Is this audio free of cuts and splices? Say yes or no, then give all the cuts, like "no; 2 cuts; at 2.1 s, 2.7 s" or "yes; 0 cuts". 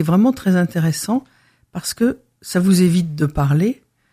yes; 0 cuts